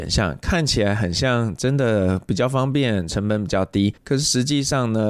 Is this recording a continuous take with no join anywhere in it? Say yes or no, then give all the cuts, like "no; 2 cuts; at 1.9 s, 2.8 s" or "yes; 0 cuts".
no; 1 cut; at 4.0 s